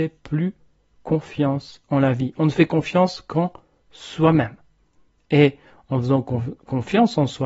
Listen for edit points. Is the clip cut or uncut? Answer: uncut